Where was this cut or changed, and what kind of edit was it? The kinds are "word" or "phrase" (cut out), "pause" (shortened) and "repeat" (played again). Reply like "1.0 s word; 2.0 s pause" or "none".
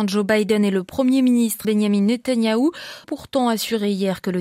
1.6 s word; 3.0 s word